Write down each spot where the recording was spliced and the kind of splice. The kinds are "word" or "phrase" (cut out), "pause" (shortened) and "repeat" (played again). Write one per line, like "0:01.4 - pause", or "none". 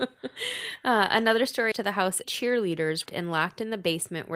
0:01.7 - word
0:02.2 - phrase
0:03.1 - phrase